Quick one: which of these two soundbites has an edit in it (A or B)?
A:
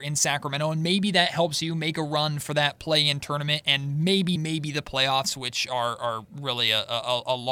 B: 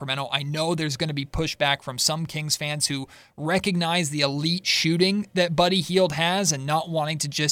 A